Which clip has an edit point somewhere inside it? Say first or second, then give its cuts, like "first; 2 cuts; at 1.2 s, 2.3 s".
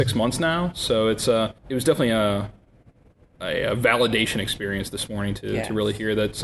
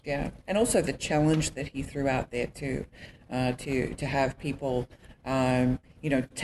first; 1 cut; at 1.6 s